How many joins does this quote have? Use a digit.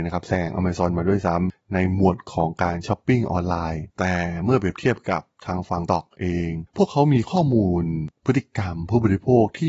2